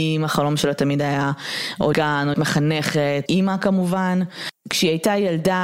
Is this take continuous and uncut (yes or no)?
no